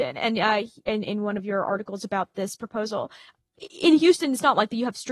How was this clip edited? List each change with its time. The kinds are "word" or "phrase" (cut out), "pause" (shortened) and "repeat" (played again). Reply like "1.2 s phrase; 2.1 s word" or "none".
none